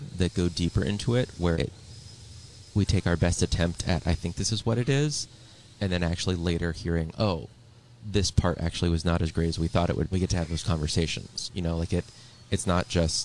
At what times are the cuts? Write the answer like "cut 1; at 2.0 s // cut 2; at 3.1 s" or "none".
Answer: cut 1; at 1.5 s // cut 2; at 10.1 s